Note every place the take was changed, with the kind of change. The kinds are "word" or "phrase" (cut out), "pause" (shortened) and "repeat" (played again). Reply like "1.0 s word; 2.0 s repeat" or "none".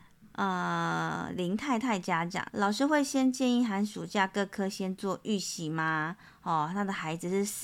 2.5 s phrase

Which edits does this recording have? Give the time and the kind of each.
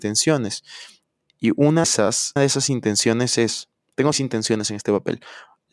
1.8 s word; 2.4 s word; 4.1 s word

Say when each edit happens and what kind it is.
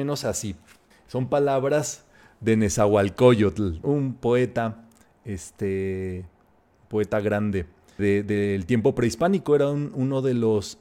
0.9 s pause; 3.8 s word; 8.0 s word

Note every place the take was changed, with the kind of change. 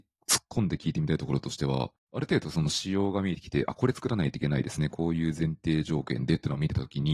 2.0 s pause

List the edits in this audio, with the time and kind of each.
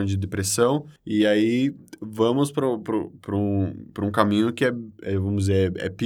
1.0 s pause

